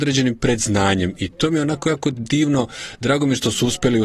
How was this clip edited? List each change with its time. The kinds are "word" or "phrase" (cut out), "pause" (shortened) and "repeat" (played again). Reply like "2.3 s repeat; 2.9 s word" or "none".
none

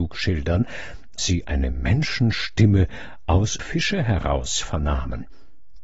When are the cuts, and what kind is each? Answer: 1.2 s word; 3.6 s word

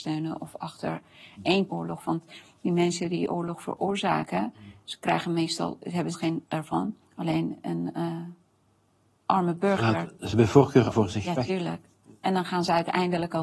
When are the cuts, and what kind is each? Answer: 1.7 s phrase; 6.1 s phrase; 6.4 s word; 7.0 s pause; 10.3 s word; 10.9 s word

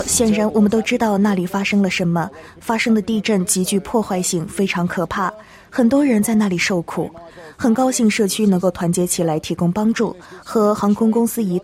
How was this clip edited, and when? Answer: none

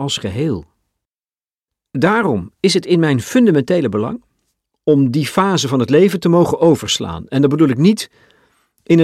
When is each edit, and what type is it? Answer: none

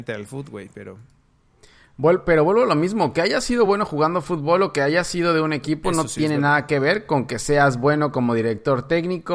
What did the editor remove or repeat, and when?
none

